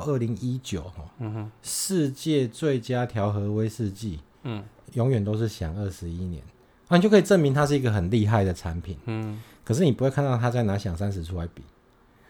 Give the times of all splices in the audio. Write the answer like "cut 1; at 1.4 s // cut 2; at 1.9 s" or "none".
none